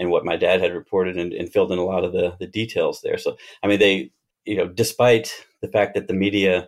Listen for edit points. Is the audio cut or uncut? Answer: uncut